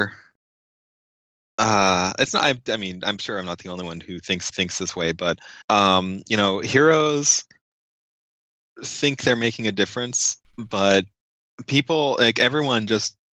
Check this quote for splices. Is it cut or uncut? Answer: cut